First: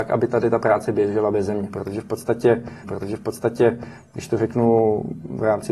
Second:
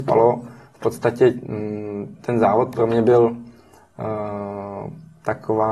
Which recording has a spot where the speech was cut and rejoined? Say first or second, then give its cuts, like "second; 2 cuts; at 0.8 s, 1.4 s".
first; 1 cut; at 2.8 s